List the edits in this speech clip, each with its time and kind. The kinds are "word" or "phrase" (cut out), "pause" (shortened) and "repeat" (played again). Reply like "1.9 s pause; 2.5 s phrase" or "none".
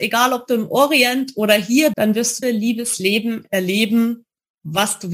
1.9 s word; 2.4 s phrase